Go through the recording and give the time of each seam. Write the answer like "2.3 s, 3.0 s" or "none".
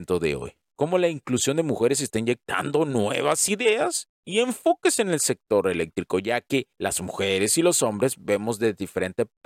6.7 s